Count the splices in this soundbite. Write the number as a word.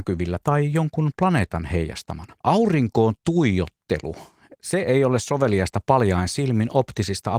one